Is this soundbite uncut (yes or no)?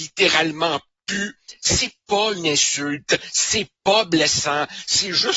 yes